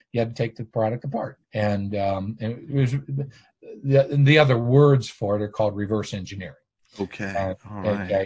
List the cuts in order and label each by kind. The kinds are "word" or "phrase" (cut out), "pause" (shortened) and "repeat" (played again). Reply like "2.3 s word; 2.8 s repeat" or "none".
1.4 s pause